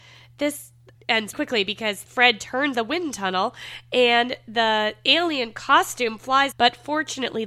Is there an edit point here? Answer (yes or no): yes